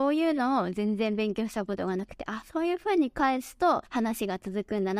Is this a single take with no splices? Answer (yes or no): no